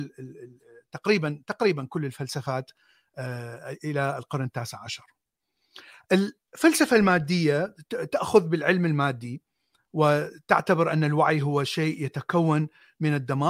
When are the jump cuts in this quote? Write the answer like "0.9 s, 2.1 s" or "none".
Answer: none